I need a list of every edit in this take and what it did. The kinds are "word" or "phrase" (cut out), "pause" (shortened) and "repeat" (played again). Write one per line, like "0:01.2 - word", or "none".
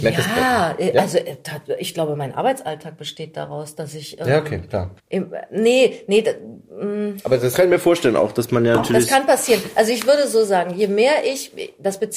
0:05.0 - pause